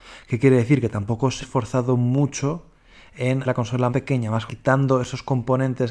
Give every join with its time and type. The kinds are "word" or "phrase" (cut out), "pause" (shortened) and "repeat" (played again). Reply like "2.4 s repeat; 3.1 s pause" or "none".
1.4 s word; 3.4 s word; 3.9 s word; 4.5 s word